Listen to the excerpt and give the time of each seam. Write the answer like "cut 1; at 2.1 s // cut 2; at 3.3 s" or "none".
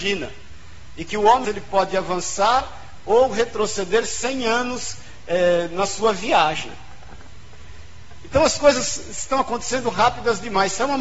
cut 1; at 1.4 s